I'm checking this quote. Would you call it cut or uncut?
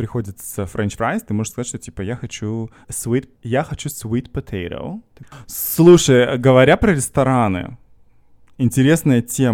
cut